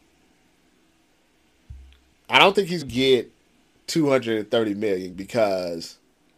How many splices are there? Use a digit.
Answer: 2